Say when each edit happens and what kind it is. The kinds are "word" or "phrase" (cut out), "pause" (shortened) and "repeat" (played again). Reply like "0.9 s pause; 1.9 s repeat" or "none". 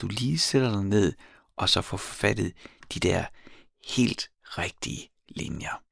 none